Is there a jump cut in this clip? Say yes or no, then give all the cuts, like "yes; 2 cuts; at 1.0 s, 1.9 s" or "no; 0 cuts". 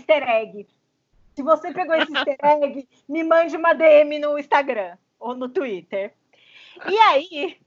no; 0 cuts